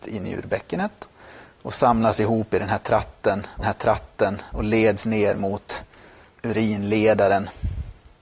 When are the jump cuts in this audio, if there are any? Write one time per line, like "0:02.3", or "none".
0:03.6
0:06.3